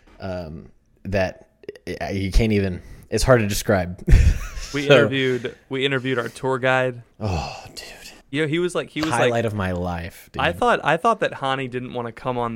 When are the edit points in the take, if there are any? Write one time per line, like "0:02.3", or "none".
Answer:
0:07.1
0:08.2